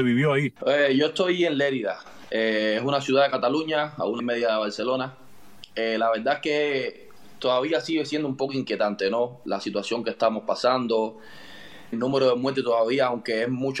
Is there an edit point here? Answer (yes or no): yes